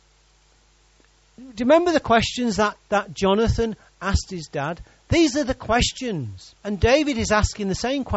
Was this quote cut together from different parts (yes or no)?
yes